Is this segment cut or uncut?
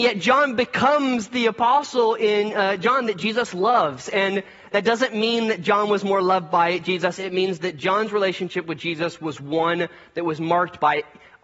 uncut